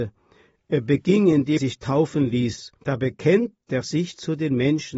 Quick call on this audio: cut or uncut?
cut